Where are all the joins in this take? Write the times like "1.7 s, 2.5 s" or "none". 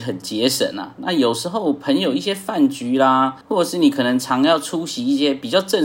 3.4 s